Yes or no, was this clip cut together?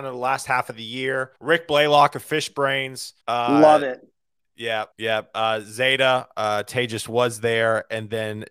yes